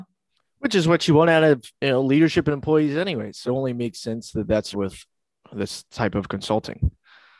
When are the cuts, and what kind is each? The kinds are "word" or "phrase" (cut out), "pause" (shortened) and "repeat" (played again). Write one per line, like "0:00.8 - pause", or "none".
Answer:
0:01.7 - pause
0:03.4 - phrase
0:04.7 - phrase